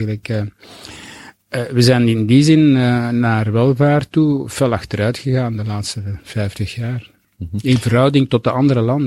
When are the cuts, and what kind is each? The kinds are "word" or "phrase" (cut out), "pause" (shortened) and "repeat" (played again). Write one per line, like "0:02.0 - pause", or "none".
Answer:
0:07.2 - pause